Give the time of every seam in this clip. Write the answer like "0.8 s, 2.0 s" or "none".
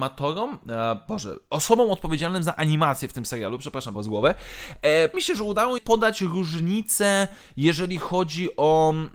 3.9 s, 5.1 s, 5.8 s